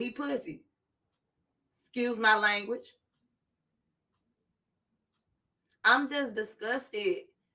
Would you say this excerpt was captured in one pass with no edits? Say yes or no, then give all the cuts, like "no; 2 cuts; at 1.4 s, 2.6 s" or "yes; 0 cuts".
yes; 0 cuts